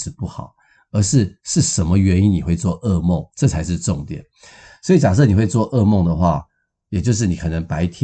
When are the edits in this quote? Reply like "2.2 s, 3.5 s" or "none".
1.4 s, 3.3 s